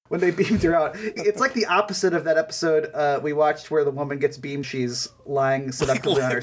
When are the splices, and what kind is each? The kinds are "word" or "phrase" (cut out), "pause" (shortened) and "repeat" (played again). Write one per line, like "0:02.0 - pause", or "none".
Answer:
0:01.2 - phrase
0:04.6 - phrase